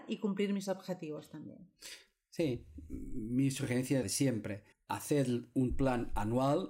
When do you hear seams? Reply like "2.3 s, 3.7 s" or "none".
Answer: 4.0 s, 4.7 s